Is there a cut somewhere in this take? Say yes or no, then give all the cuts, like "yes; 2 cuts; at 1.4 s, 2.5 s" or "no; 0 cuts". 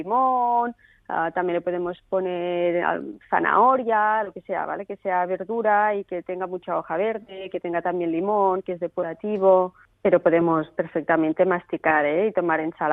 no; 0 cuts